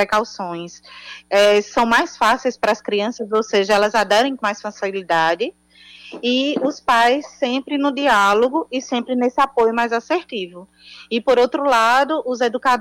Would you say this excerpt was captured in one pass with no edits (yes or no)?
no